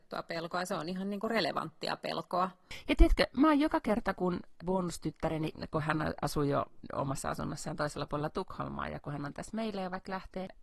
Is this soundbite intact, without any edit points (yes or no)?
no